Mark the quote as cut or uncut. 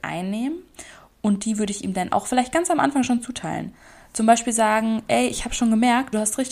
uncut